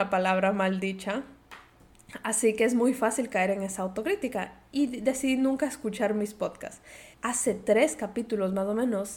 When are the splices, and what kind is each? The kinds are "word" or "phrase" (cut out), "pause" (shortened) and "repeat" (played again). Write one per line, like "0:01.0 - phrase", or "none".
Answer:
0:07.1 - pause